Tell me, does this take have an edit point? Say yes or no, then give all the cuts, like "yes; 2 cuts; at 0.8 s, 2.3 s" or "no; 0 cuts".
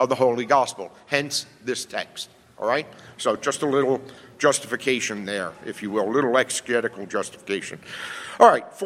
no; 0 cuts